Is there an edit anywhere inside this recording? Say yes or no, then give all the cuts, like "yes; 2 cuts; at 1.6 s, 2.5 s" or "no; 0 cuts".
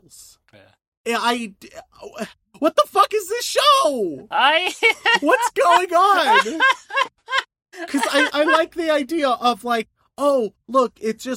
no; 0 cuts